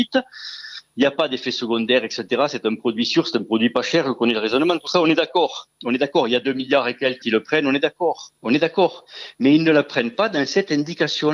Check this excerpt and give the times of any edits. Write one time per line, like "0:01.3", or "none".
0:07.2
0:08.4

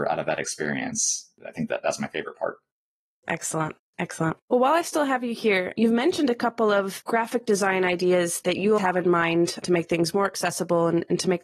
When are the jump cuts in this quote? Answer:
0:04.4
0:08.8

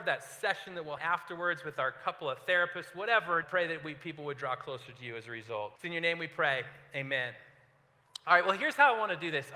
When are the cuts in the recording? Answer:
0:01.0
0:03.4
0:05.8

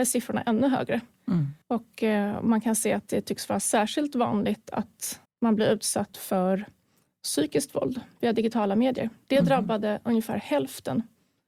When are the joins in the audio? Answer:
0:05.2

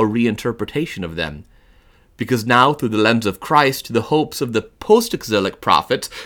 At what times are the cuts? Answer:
none

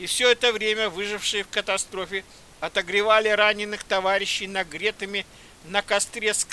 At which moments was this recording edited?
none

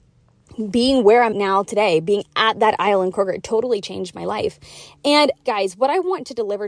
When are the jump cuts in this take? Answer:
0:01.3
0:05.4

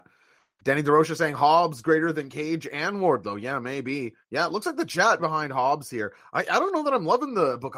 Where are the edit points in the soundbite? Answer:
0:04.2
0:05.2

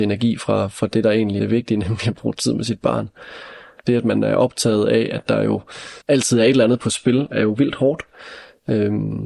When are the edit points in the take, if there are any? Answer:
0:01.4
0:06.0

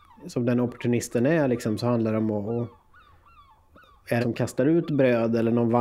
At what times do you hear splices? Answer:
0:04.2

